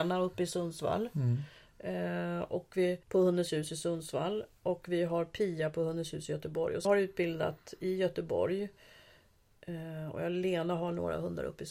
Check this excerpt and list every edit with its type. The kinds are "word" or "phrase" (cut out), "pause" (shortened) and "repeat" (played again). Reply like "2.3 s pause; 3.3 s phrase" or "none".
3.0 s pause; 6.8 s phrase